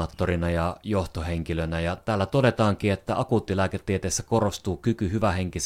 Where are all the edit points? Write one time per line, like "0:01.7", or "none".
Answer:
0:02.0